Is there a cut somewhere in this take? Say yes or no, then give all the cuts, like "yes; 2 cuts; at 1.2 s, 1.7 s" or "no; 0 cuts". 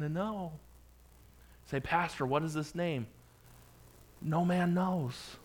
no; 0 cuts